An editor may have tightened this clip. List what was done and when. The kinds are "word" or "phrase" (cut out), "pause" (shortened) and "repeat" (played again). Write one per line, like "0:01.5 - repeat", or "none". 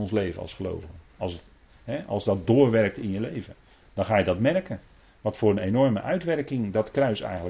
none